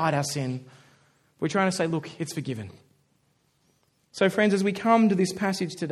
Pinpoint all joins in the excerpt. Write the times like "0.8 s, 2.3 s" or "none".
none